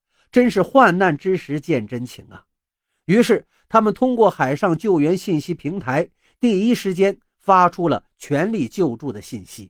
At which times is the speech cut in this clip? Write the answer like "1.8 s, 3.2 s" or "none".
none